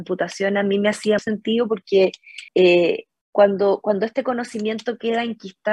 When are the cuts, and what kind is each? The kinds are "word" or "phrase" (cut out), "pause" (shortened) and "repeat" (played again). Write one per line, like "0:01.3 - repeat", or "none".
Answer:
0:01.2 - word
0:02.5 - pause